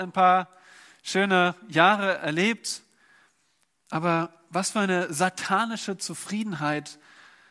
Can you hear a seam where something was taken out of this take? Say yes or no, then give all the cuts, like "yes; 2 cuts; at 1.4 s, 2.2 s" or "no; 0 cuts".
no; 0 cuts